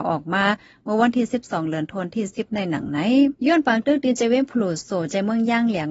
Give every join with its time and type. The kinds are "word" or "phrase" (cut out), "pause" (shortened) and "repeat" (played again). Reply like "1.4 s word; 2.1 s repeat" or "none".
3.4 s pause